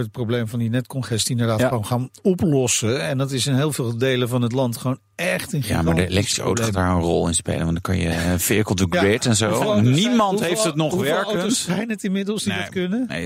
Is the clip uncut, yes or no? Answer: yes